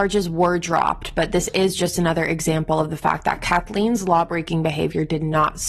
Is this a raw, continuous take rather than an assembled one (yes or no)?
yes